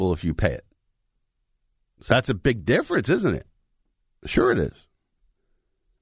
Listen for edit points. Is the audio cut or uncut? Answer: uncut